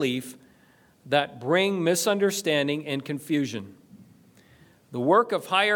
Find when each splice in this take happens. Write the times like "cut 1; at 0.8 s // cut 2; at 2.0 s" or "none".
none